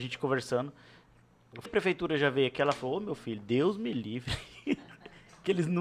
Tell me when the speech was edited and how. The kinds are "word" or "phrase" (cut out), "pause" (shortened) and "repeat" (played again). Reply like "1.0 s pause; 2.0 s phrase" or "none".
1.7 s word

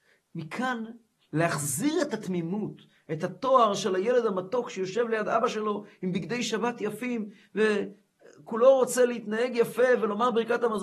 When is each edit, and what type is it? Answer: none

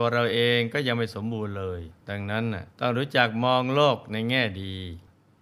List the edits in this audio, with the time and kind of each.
2.0 s pause; 2.7 s pause

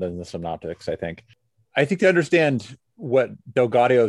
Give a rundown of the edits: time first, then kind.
none

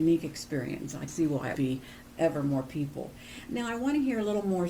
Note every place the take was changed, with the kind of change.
1.1 s word; 1.6 s word; 2.0 s word

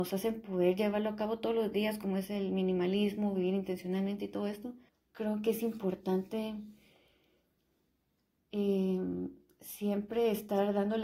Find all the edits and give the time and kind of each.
4.9 s pause

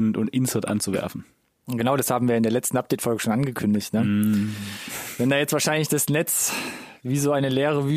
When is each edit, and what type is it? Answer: none

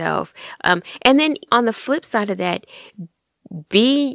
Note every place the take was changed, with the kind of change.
1.5 s word

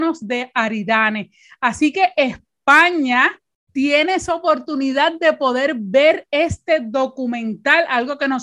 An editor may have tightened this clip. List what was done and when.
none

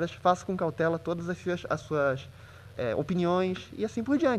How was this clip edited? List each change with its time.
2.7 s word

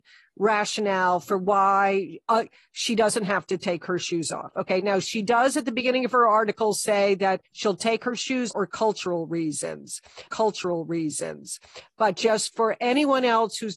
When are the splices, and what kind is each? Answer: 7.4 s pause; 8.5 s phrase; 10.3 s repeat

